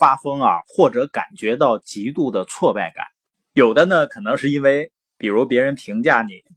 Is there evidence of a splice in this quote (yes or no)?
yes